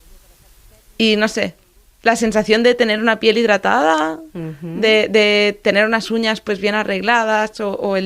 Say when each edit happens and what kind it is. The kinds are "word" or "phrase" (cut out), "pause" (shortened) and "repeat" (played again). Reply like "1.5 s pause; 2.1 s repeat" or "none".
none